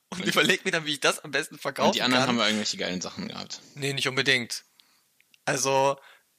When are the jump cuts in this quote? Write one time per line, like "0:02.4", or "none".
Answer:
none